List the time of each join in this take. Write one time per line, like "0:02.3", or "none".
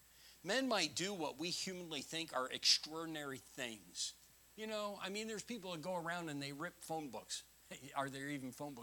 none